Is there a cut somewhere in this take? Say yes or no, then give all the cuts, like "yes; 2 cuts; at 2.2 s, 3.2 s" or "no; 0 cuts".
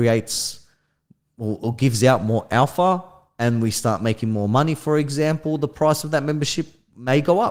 no; 0 cuts